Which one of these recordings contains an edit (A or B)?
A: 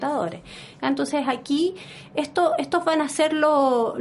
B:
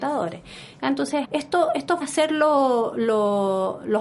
B